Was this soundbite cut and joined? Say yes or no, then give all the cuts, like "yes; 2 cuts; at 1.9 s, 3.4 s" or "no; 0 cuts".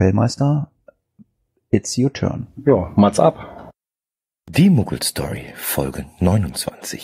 no; 0 cuts